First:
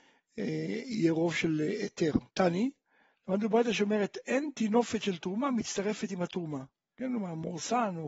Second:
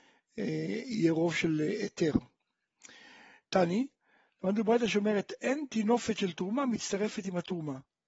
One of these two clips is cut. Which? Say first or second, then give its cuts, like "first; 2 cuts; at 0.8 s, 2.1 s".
first; 1 cut; at 2.3 s